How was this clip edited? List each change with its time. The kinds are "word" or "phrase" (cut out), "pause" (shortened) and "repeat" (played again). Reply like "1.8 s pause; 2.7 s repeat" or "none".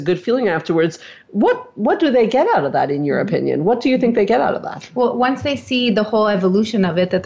none